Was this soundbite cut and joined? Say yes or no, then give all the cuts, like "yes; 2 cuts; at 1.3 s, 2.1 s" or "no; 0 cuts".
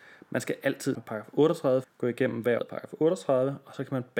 yes; 3 cuts; at 0.9 s, 1.8 s, 2.6 s